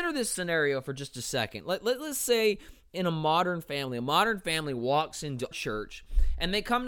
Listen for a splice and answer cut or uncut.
cut